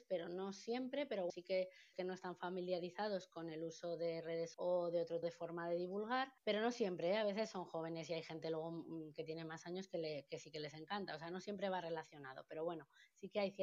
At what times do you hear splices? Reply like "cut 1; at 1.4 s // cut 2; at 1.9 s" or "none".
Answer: cut 1; at 1.3 s // cut 2; at 1.9 s // cut 3; at 4.5 s // cut 4; at 5.2 s // cut 5; at 6.4 s